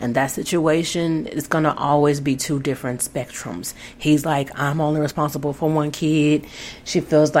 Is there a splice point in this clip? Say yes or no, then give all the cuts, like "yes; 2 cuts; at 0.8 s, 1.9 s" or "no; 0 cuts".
no; 0 cuts